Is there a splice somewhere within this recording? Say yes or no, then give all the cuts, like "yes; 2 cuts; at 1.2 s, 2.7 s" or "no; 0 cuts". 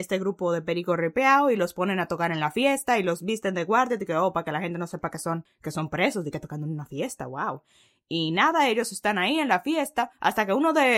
no; 0 cuts